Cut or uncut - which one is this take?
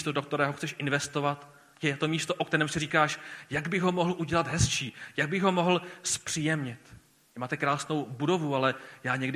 uncut